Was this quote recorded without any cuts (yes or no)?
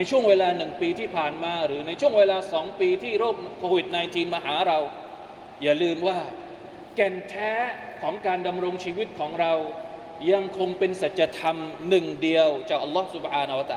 yes